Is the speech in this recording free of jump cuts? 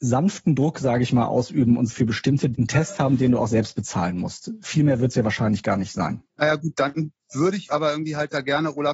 no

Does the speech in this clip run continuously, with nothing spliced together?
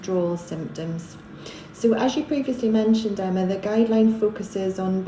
yes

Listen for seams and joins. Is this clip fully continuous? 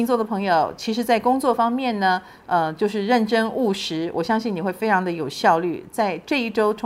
yes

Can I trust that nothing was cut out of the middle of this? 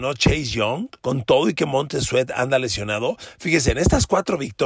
no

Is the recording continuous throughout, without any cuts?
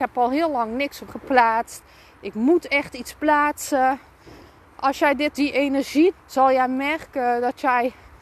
no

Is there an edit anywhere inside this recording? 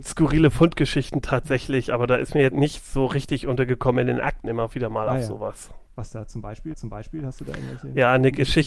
yes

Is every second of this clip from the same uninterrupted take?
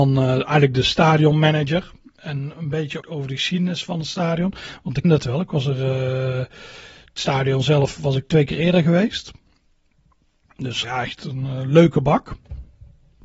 no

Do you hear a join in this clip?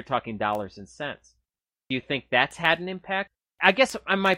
no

